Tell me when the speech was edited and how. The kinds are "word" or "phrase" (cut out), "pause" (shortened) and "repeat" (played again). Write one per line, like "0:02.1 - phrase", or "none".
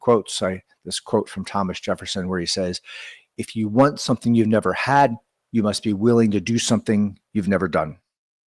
none